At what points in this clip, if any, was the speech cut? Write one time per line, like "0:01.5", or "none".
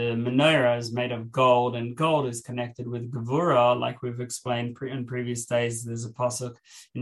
none